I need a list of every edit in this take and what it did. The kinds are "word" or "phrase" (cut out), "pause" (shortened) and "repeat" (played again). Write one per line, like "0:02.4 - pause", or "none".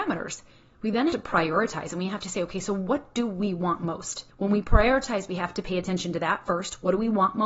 0:01.1 - word
0:04.3 - pause